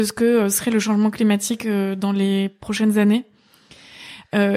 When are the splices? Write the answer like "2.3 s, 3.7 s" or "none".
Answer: none